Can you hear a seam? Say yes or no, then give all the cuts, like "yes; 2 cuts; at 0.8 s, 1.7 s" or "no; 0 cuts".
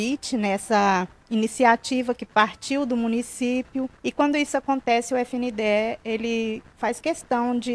yes; 1 cut; at 4.0 s